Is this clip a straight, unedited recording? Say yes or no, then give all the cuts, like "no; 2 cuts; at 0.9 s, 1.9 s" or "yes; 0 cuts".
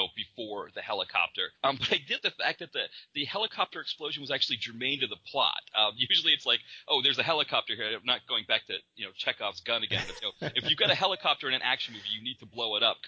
no; 3 cuts; at 2.2 s, 6.4 s, 10.2 s